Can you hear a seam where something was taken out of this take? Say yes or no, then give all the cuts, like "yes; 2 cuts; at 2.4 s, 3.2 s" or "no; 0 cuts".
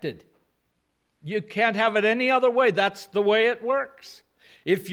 no; 0 cuts